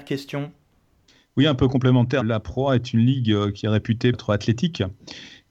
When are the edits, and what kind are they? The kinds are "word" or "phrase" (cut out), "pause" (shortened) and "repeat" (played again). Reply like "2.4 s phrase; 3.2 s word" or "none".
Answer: 2.2 s phrase; 4.1 s word